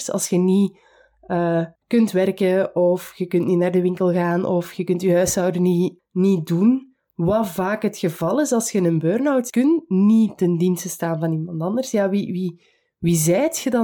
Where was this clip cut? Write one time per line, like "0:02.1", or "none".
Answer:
0:01.8
0:06.0
0:09.5